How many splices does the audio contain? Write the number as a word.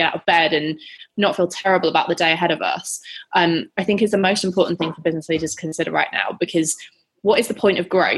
zero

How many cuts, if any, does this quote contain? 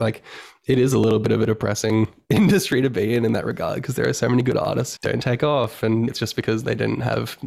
two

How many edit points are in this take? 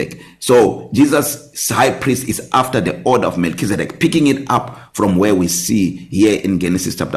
zero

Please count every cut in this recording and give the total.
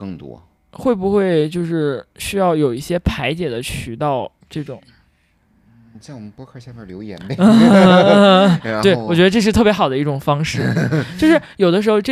one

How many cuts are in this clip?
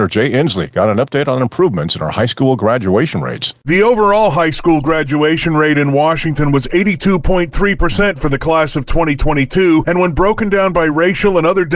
zero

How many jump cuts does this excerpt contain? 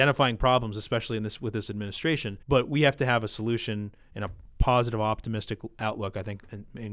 one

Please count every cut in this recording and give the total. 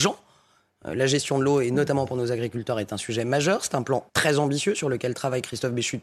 one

